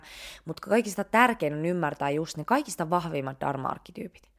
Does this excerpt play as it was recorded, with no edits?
yes; 0 cuts

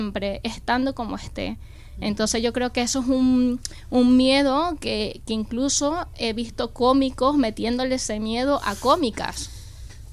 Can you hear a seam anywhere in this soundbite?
no; 0 cuts

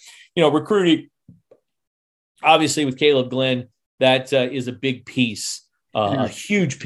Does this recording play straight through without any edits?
yes; 0 cuts

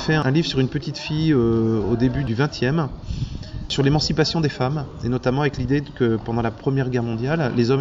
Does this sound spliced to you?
no; 0 cuts

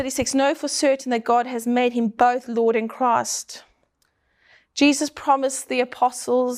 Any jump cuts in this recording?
no; 0 cuts

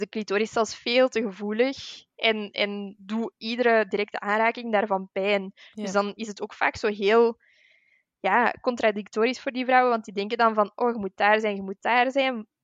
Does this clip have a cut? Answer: no; 0 cuts

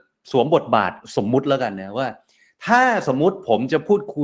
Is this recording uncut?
yes; 0 cuts

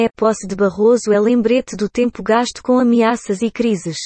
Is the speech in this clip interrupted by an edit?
no; 0 cuts

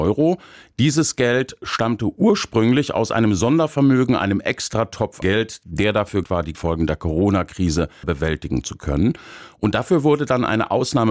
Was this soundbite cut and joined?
yes; 4 cuts; at 5.2 s, 6.2 s, 6.5 s, 8.0 s

